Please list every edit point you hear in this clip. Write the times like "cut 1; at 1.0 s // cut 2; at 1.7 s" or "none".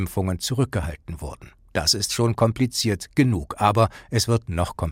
none